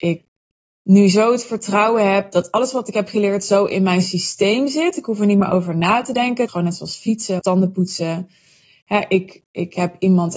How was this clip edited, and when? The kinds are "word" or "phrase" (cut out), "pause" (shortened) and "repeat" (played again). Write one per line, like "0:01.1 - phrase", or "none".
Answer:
0:06.5 - word
0:07.4 - word

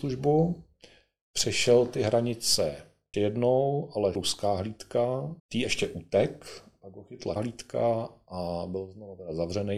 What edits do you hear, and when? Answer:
0:03.1 - word
0:04.1 - phrase
0:05.4 - pause
0:07.4 - word

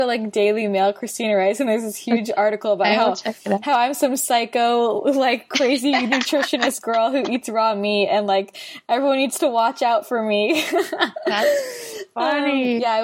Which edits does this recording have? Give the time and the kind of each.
none

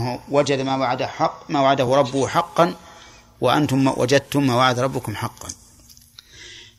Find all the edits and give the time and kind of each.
none

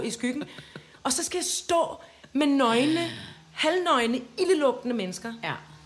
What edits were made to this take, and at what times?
none

